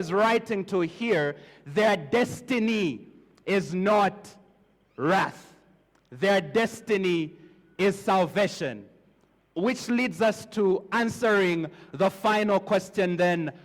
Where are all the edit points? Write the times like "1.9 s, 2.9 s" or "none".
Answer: none